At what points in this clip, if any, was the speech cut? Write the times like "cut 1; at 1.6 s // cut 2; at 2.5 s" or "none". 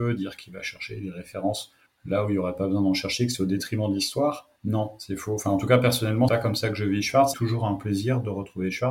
cut 1; at 1.9 s // cut 2; at 4.6 s // cut 3; at 6.3 s // cut 4; at 7.3 s